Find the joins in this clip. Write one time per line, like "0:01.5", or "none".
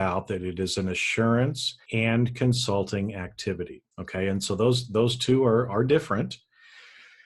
0:01.8
0:03.9